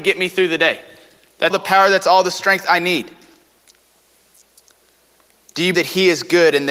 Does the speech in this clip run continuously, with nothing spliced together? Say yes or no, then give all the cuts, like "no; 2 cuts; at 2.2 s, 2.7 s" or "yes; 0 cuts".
no; 2 cuts; at 1.5 s, 5.7 s